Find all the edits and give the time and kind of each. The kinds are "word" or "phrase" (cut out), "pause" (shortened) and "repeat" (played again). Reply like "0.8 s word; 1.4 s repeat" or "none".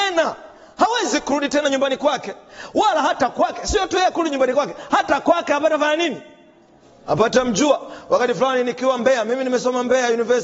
none